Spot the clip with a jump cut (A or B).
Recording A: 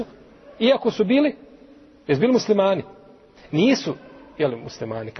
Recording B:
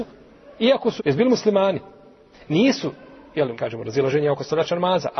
B